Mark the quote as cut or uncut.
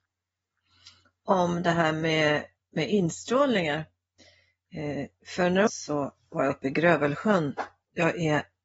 cut